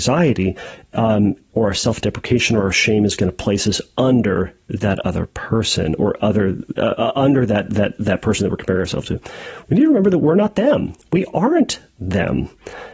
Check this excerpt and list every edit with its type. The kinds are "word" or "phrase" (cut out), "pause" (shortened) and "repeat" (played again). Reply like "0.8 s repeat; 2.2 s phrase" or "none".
none